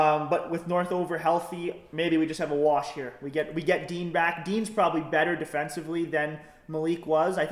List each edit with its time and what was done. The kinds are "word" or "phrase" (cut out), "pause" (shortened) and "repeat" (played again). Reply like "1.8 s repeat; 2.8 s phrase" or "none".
none